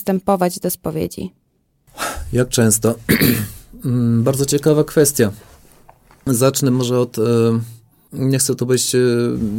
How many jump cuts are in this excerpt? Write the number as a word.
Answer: zero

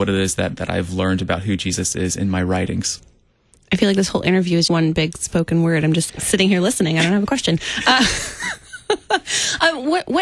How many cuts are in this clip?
two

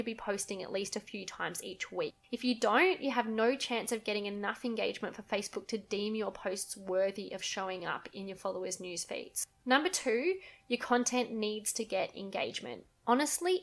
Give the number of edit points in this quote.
zero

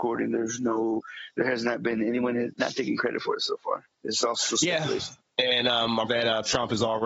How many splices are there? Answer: four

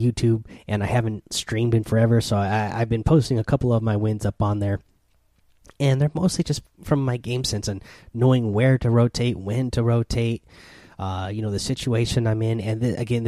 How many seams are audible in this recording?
zero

